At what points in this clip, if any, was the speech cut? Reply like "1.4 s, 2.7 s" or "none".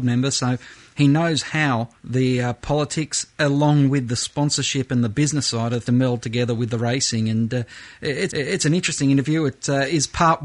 2.0 s, 5.8 s, 8.3 s